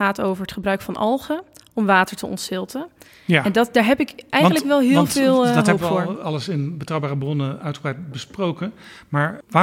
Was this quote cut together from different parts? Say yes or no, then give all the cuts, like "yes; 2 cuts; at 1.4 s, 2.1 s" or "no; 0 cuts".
no; 0 cuts